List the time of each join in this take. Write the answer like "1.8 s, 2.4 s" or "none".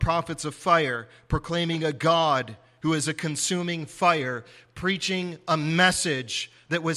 none